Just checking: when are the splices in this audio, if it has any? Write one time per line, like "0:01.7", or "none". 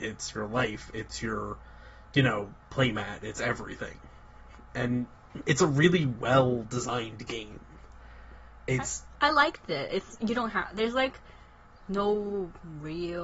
none